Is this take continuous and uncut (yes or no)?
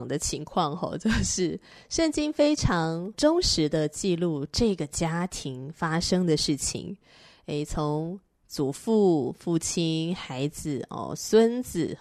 yes